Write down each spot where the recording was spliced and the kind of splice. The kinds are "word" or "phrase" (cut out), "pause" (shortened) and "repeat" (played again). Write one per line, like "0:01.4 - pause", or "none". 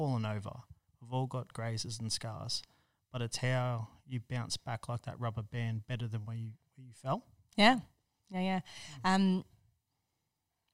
none